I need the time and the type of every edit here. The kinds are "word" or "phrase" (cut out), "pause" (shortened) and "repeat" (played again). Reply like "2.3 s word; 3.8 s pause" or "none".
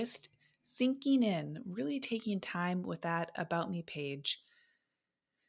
none